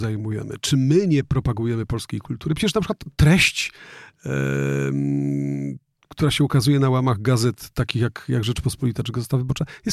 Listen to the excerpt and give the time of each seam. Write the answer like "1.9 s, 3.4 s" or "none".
none